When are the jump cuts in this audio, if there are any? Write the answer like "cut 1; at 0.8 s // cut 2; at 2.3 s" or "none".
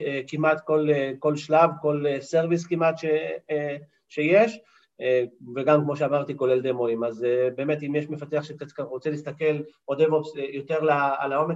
none